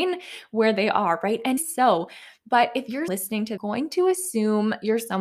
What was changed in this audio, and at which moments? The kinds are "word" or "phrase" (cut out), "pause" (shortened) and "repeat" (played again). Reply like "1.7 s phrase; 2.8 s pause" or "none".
1.6 s word; 3.1 s word; 3.6 s phrase